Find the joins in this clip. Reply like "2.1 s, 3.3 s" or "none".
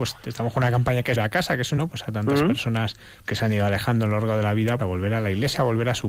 1.2 s, 1.8 s, 3.3 s, 4.8 s